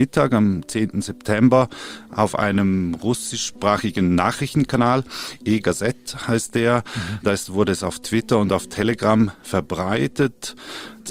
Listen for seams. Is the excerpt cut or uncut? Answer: uncut